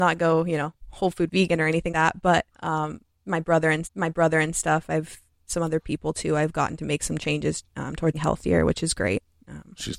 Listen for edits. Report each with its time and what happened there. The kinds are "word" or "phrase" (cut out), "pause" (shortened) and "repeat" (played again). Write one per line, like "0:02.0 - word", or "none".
0:01.3 - word
0:01.9 - word
0:02.5 - pause
0:03.8 - repeat
0:07.7 - pause
0:08.1 - word